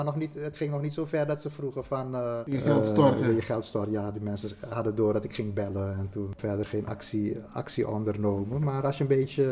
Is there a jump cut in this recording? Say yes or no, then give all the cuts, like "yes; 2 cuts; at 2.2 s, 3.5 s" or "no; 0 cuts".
no; 0 cuts